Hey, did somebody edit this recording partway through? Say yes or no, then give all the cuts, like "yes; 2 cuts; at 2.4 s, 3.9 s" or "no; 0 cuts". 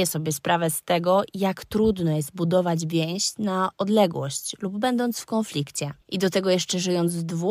yes; 1 cut; at 6.0 s